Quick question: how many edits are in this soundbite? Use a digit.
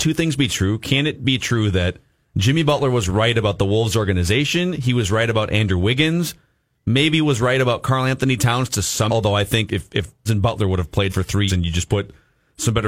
5